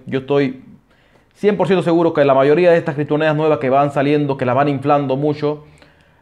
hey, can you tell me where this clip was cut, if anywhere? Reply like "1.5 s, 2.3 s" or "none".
none